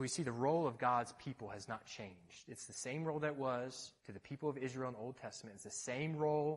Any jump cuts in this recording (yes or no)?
yes